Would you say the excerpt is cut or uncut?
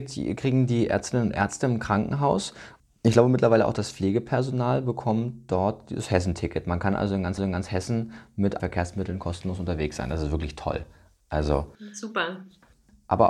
cut